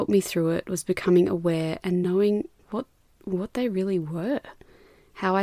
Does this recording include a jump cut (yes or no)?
no